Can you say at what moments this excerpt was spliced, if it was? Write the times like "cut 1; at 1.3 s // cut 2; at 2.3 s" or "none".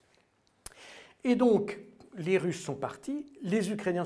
none